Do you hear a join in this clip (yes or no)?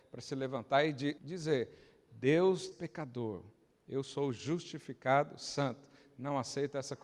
yes